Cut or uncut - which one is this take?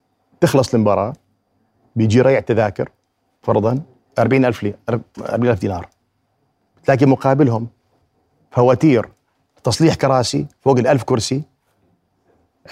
uncut